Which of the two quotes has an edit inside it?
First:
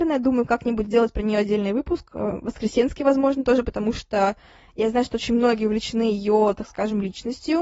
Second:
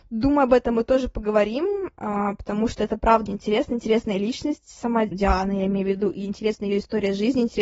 second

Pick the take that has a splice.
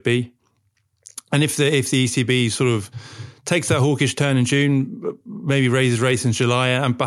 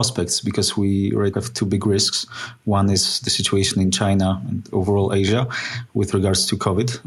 second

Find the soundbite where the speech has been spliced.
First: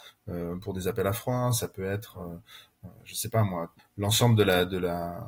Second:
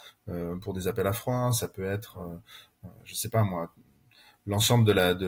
first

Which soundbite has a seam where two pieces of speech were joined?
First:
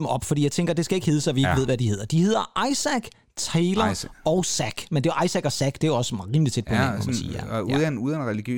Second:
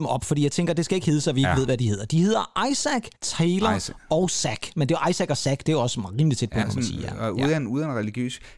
second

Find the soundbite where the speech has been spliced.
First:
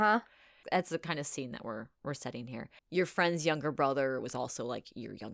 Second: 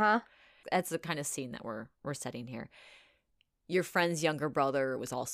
first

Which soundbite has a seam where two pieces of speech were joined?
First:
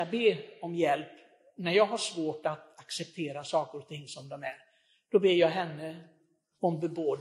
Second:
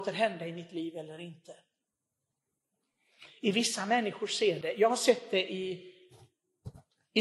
second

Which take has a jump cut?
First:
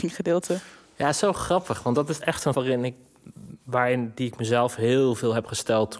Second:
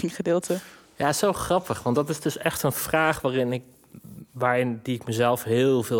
first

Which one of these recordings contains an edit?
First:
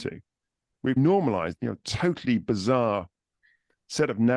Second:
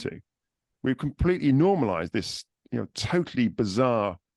first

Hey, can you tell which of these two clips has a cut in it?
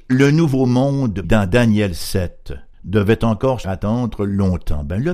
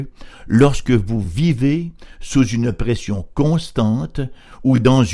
first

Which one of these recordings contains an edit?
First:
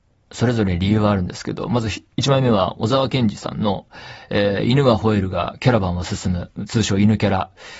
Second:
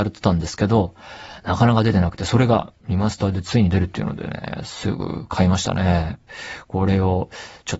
first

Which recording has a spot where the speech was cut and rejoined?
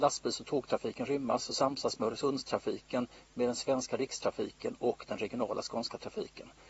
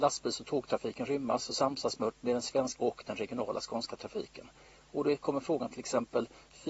second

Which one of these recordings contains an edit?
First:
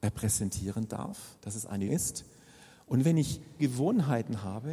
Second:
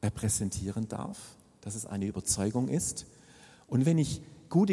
first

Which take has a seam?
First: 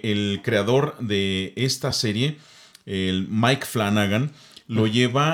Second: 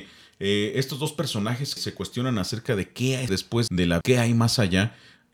second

